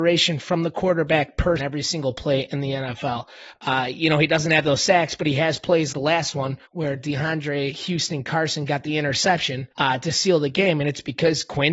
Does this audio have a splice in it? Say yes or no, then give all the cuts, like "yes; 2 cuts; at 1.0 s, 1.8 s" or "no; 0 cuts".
yes; 4 cuts; at 1.6 s, 5.9 s, 6.6 s, 9.7 s